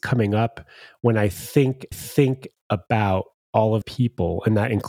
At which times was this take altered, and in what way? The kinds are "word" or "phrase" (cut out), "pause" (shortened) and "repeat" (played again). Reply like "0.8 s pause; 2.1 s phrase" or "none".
1.9 s repeat; 3.8 s word

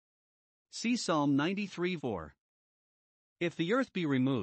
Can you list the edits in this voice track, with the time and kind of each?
2.0 s word

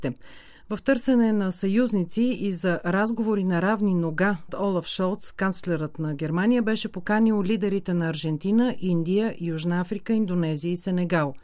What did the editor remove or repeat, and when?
4.5 s word

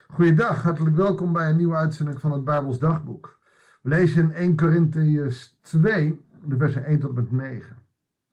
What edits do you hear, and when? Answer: none

